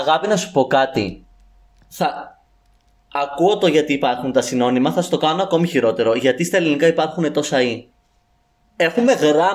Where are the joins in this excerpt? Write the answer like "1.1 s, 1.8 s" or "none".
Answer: none